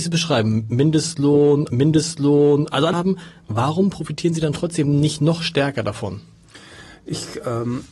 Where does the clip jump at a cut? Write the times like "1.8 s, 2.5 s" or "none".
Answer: 1.7 s, 2.9 s

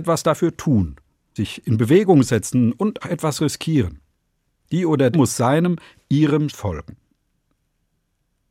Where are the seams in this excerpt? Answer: 1.4 s, 3.0 s, 5.1 s, 6.5 s

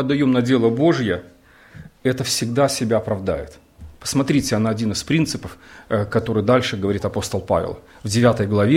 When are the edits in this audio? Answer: 3.9 s

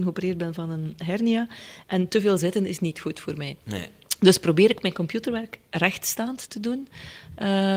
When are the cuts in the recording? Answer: none

